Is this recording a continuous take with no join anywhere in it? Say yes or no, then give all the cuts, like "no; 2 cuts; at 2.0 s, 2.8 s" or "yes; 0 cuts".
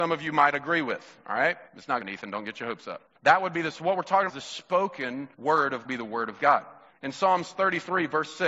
no; 8 cuts; at 1.7 s, 2.0 s, 3.1 s, 3.7 s, 4.3 s, 5.3 s, 5.8 s, 6.9 s